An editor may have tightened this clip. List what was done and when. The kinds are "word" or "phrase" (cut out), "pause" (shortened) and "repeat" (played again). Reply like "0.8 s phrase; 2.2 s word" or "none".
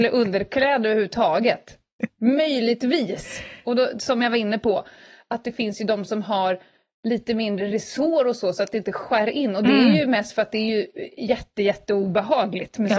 none